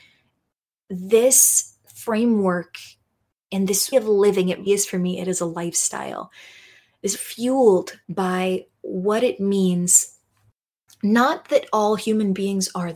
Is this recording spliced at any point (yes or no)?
yes